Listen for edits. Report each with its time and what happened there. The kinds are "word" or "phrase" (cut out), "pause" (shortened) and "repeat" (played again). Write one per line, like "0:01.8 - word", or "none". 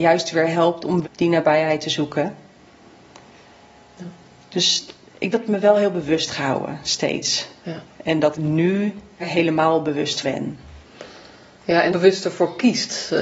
0:01.0 - word
0:05.3 - word
0:06.3 - word
0:08.3 - word
0:09.2 - word
0:10.2 - word
0:11.9 - word